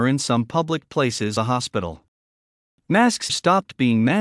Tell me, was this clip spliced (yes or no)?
yes